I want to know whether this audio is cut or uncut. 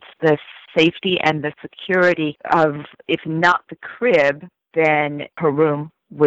uncut